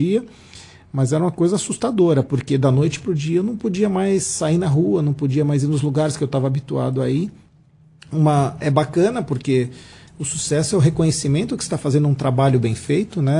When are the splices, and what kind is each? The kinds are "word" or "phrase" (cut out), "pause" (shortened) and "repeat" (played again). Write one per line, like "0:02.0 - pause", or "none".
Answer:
0:08.6 - word